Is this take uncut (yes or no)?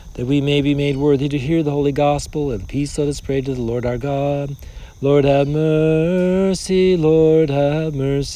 yes